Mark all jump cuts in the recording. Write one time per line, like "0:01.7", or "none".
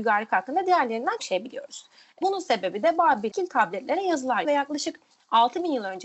0:01.2
0:02.2
0:03.3
0:04.4